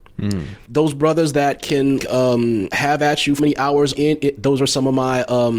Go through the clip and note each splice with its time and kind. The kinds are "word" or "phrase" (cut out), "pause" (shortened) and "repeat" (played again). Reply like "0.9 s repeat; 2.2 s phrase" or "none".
2.0 s word; 2.7 s word; 3.4 s word; 4.0 s word